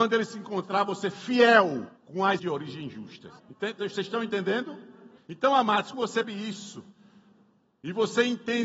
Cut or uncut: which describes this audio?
cut